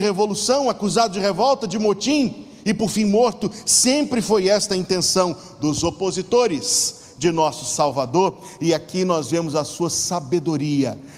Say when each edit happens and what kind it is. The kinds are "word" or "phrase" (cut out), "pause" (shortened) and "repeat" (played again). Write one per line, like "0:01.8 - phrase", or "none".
none